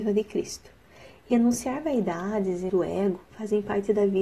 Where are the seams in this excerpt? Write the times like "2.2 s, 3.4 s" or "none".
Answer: 2.7 s

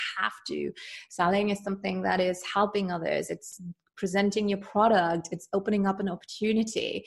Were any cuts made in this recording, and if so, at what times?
none

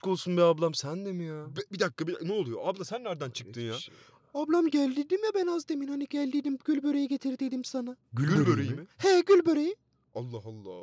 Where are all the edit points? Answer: none

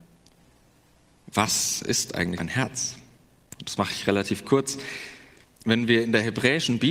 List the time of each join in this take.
2.4 s, 5.4 s

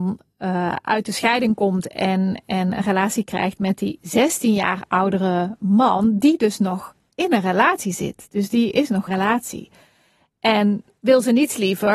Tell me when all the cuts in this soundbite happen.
9.1 s

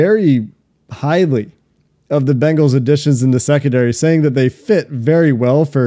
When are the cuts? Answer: none

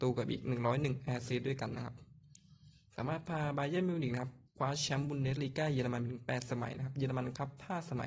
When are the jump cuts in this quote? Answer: 4.5 s

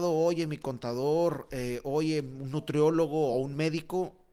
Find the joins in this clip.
none

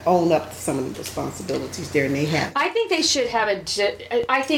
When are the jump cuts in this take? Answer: 0.9 s

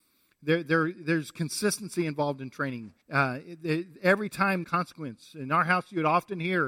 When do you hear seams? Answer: 3.0 s, 4.6 s

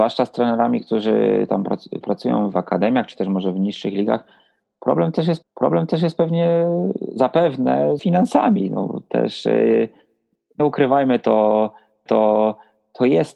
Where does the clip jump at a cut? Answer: 2.0 s, 2.5 s, 5.4 s, 8.0 s, 10.6 s, 12.1 s

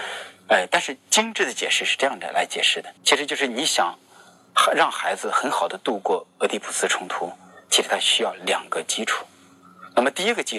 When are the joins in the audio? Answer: 3.0 s

